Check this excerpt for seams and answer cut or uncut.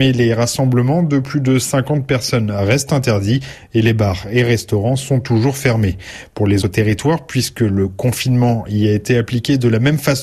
cut